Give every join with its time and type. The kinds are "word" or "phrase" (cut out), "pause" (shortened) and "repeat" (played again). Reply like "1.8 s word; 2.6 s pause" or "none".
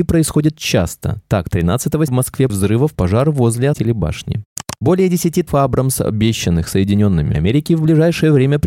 2.1 s word; 2.5 s word; 2.9 s word; 3.7 s word; 5.5 s word; 7.3 s word